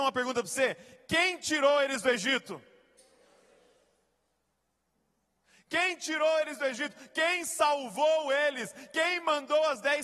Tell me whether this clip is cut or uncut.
uncut